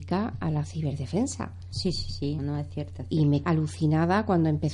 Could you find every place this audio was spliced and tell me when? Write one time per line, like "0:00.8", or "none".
0:02.4
0:03.4